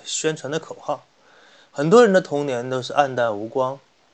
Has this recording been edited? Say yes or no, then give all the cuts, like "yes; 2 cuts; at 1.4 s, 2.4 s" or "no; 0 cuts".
no; 0 cuts